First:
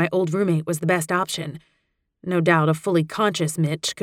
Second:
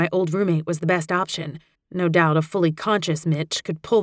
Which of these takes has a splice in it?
second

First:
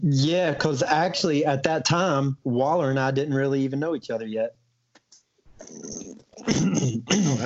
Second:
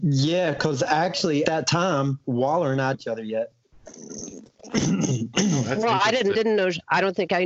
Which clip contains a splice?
second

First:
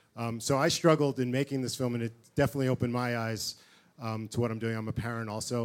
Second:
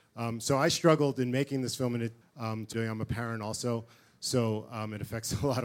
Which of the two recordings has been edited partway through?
second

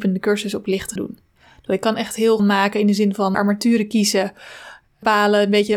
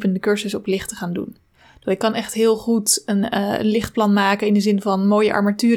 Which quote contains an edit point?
first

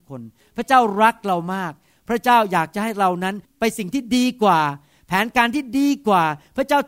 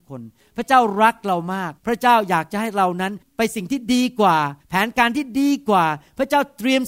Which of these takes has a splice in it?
second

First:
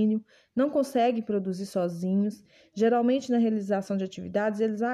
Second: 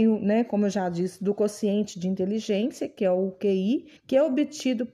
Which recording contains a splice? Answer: second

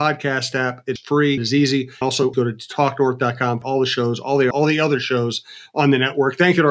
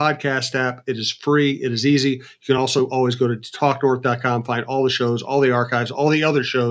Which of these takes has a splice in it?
first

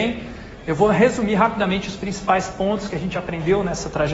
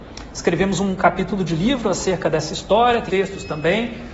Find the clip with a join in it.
second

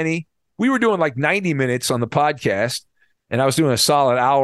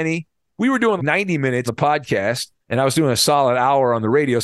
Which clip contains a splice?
second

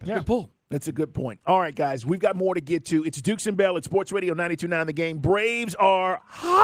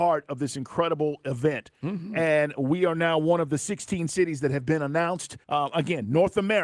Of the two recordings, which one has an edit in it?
second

